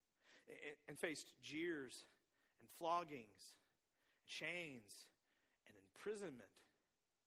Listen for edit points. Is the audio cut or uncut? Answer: cut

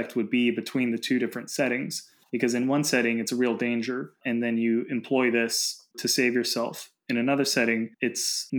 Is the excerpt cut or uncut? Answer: cut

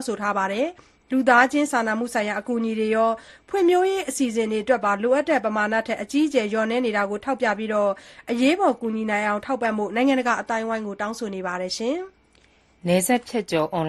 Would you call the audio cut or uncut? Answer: uncut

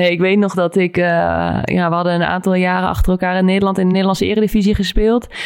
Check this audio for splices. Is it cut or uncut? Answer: uncut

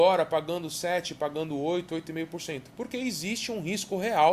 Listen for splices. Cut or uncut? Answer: uncut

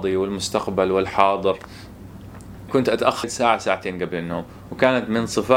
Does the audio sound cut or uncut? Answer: cut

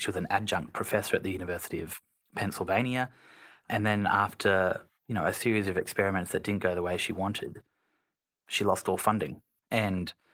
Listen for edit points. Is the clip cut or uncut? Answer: uncut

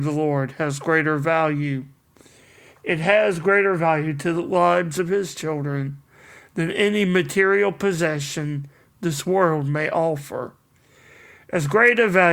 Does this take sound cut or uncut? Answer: uncut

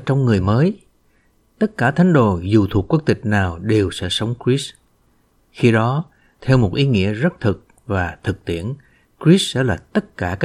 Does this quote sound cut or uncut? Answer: uncut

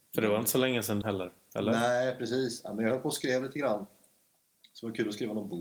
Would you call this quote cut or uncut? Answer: cut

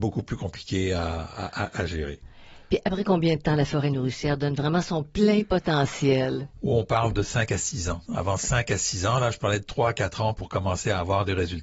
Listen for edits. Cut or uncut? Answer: cut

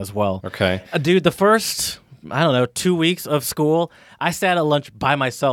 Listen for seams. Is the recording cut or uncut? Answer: uncut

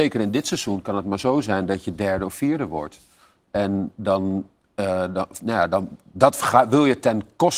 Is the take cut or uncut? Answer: uncut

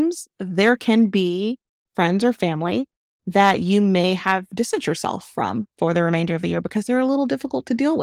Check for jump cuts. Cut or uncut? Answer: cut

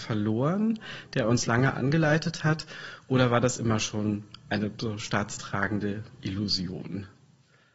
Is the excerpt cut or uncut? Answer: uncut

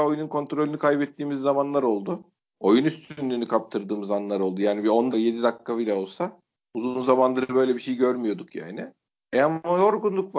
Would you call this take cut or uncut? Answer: cut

